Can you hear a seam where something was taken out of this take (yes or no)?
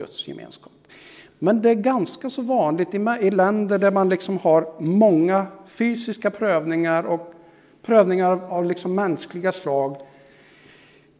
no